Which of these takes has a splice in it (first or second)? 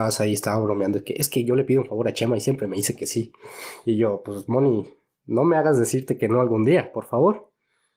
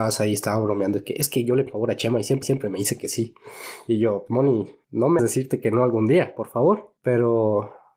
second